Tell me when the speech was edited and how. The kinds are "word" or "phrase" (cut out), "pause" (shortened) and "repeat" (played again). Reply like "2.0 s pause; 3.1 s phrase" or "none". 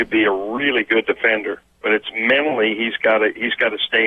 1.7 s pause